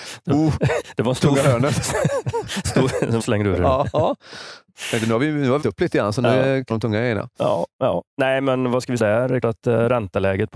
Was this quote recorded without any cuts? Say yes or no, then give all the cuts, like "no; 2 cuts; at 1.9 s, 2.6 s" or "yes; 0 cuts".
no; 6 cuts; at 3.2 s, 5.6 s, 6.7 s, 8.1 s, 9.0 s, 9.4 s